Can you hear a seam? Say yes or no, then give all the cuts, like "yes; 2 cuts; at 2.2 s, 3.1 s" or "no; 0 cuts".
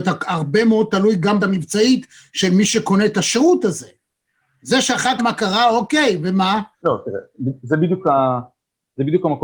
yes; 3 cuts; at 1.4 s, 5.2 s, 6.7 s